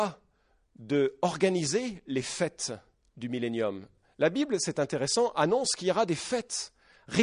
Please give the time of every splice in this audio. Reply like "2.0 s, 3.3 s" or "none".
none